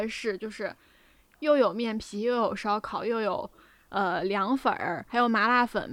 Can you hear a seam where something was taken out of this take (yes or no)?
no